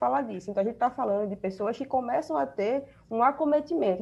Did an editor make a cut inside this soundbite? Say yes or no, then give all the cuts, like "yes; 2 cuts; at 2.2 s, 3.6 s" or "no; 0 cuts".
no; 0 cuts